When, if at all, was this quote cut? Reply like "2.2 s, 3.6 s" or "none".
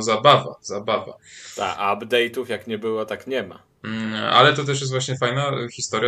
none